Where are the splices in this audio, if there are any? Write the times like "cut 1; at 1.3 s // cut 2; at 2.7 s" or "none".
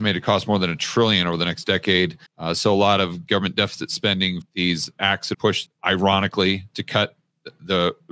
cut 1; at 2.3 s // cut 2; at 4.4 s // cut 3; at 5.3 s // cut 4; at 5.7 s

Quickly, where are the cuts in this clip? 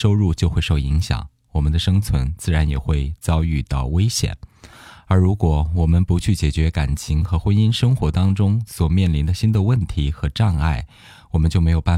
none

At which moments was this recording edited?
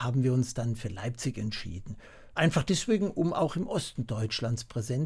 none

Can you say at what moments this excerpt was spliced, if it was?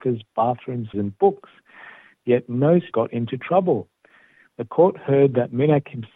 cut 1; at 0.9 s // cut 2; at 2.9 s

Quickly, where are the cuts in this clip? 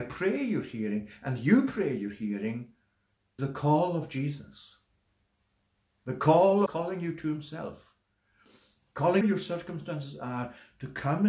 cut 1; at 3.4 s // cut 2; at 6.7 s // cut 3; at 9.2 s

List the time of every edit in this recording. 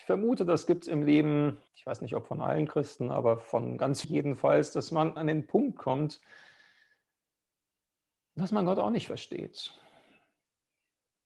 cut 1; at 1.7 s // cut 2; at 4.0 s // cut 3; at 5.2 s

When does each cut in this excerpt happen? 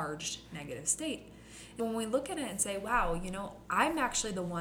cut 1; at 1.8 s

